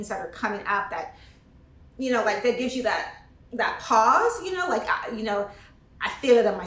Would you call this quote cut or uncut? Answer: uncut